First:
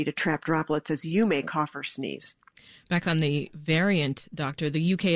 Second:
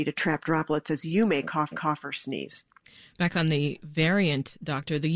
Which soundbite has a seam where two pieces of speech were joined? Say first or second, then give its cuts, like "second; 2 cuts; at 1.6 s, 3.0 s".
second; 1 cut; at 1.7 s